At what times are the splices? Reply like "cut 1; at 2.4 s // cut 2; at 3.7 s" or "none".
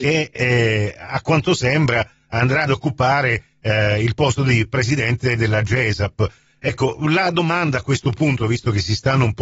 none